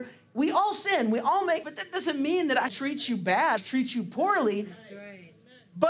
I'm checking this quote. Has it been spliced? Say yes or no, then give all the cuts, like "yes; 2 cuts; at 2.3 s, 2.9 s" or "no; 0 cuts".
yes; 3 cuts; at 1.6 s, 2.7 s, 3.6 s